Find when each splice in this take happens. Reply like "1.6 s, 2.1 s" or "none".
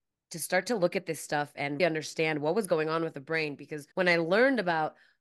1.8 s, 3.9 s